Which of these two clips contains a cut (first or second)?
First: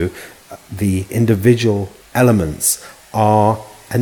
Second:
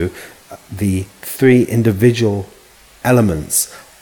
first